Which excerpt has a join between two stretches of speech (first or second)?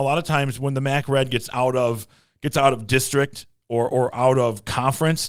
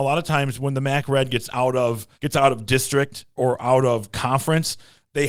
second